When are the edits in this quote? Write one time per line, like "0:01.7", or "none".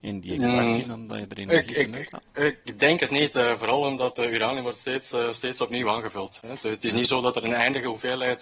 none